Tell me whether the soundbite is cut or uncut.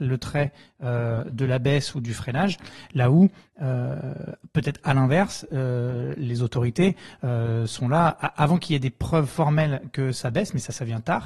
uncut